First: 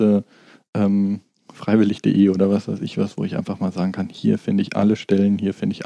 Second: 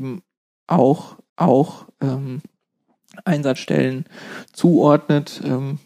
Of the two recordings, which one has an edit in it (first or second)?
second